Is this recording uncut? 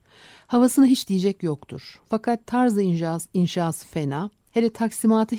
yes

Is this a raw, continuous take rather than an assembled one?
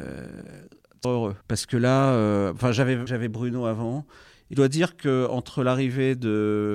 no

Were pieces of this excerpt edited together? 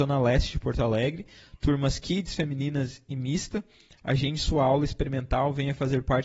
no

